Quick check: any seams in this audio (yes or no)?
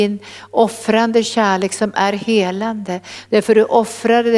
no